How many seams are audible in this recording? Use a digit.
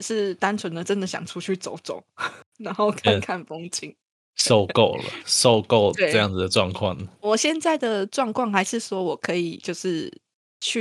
1